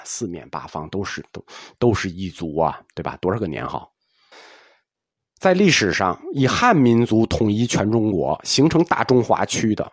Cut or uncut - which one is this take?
cut